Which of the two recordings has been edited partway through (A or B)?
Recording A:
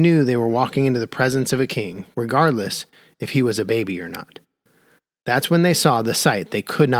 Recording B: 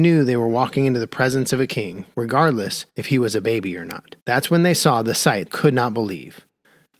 B